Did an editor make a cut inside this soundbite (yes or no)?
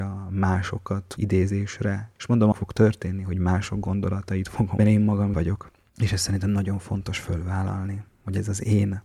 yes